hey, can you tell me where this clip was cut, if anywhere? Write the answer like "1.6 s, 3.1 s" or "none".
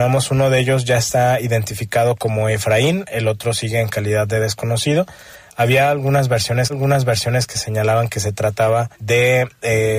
6.7 s, 8.9 s